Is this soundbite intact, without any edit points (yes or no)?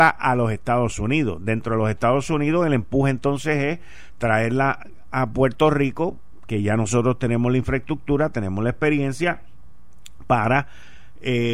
yes